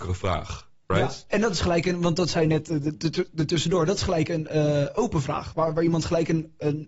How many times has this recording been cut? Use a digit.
0